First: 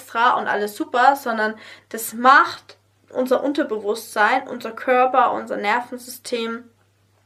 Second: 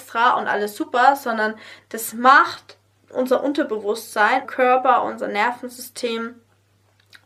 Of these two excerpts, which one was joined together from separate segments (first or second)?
second